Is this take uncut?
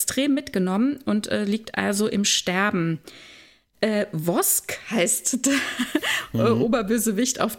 yes; 0 cuts

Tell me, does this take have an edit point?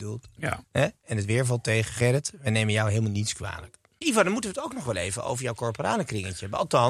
no; 0 cuts

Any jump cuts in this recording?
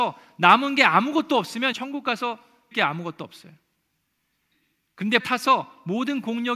yes; 3 cuts; at 1.7 s, 2.7 s, 5.2 s

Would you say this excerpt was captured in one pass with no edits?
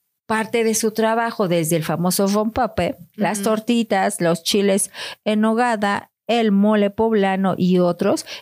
yes; 0 cuts

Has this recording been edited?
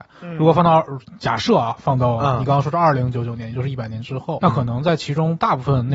yes; 1 cut; at 4.4 s

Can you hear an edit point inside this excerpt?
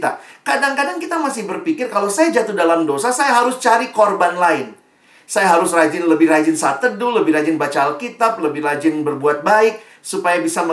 no; 0 cuts

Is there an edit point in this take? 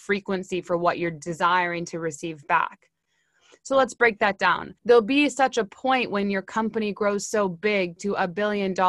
yes; 1 cut; at 4.8 s

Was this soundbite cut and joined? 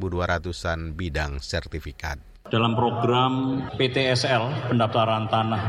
no; 0 cuts

